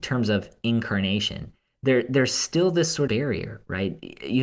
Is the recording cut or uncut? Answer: cut